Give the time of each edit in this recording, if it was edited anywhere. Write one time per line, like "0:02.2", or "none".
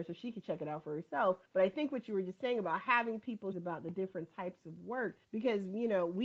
0:01.5
0:03.5
0:05.2